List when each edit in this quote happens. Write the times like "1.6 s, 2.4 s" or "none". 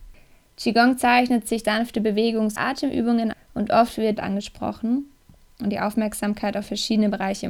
1.6 s, 2.6 s, 3.3 s, 4.2 s